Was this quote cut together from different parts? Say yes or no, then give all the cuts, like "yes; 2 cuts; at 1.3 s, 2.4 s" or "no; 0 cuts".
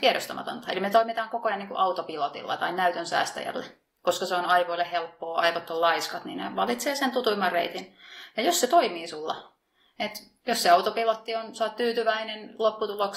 no; 0 cuts